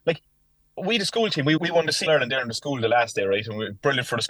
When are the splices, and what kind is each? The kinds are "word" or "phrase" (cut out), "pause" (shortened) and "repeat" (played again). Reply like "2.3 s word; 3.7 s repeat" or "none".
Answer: 1.6 s word; 2.1 s word